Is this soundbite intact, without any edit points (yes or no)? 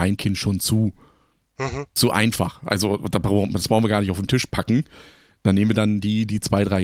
yes